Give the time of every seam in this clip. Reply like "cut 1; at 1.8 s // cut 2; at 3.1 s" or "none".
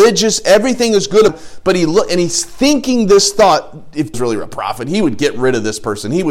cut 1; at 1.3 s // cut 2; at 4.1 s